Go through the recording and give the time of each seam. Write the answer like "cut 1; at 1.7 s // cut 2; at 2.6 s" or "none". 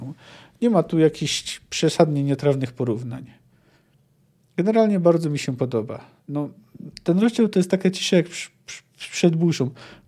cut 1; at 6.2 s